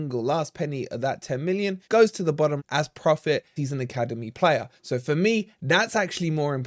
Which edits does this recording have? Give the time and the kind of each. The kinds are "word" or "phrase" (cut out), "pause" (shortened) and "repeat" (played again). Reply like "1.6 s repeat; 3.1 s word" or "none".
1.8 s pause; 2.6 s word; 3.6 s word; 4.8 s pause